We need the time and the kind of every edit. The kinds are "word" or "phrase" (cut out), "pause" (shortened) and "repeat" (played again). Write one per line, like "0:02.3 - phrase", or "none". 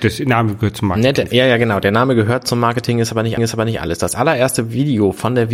0:03.4 - repeat